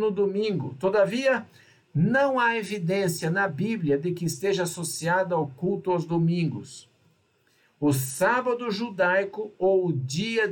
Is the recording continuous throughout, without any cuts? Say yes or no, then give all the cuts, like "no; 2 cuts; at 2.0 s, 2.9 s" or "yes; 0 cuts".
yes; 0 cuts